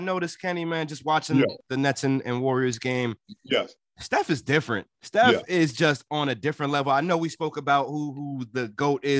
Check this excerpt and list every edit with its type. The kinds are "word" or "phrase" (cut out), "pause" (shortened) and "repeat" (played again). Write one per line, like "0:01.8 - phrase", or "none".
0:04.9 - pause